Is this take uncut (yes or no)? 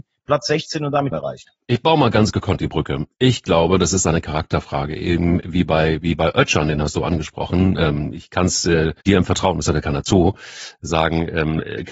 no